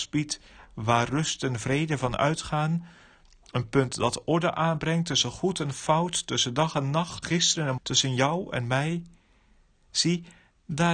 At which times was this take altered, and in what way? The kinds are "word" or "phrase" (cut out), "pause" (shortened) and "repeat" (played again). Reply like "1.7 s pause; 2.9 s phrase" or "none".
7.2 s word; 7.8 s word